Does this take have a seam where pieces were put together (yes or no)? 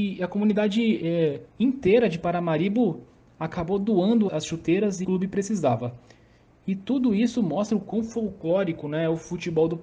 yes